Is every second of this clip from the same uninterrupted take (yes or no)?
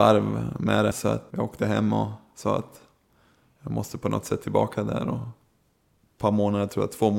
no